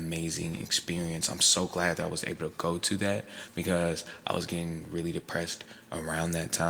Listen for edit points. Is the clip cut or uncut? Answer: uncut